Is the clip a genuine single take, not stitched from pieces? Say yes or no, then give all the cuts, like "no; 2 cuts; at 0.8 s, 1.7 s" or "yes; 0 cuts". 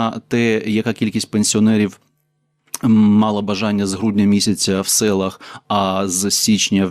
yes; 0 cuts